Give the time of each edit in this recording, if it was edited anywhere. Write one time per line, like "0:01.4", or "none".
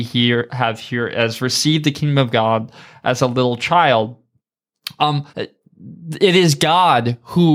0:05.3